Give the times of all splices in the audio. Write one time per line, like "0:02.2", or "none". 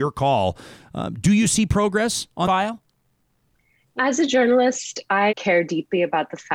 0:02.4
0:04.0
0:05.3

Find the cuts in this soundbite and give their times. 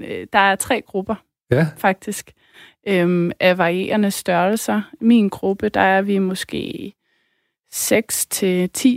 none

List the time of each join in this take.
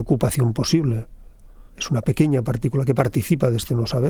none

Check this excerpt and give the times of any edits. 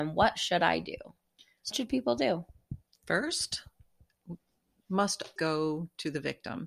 0:01.7
0:04.8
0:05.4

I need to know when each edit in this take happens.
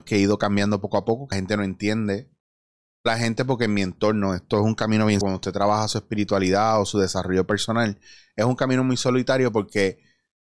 0:01.3
0:03.1
0:05.2

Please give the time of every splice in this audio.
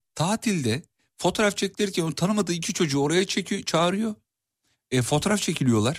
none

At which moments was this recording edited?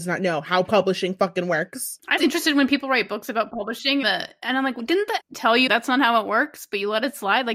0:02.2
0:04.0
0:05.2
0:05.7

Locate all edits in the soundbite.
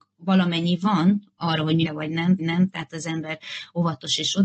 0:01.8
0:02.4

